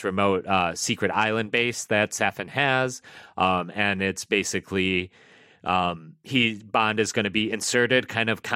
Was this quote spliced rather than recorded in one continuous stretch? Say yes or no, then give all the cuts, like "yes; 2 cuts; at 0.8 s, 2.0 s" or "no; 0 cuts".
no; 0 cuts